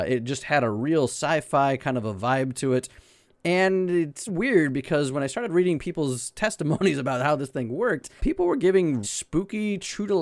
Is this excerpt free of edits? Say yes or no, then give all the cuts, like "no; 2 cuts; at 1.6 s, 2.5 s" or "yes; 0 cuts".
no; 3 cuts; at 4.3 s, 8.2 s, 9.0 s